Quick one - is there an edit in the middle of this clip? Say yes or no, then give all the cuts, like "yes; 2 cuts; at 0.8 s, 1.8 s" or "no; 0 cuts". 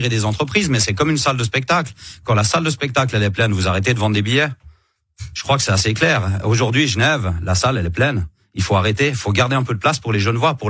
no; 0 cuts